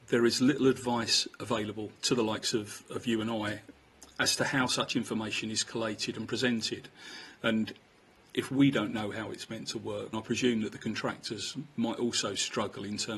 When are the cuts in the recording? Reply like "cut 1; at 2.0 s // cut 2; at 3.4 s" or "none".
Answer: cut 1; at 2.0 s // cut 2; at 10.1 s